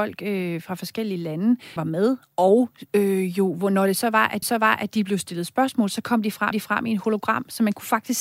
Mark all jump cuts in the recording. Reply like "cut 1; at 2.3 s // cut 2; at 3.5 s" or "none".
cut 1; at 1.8 s // cut 2; at 4.4 s // cut 3; at 6.5 s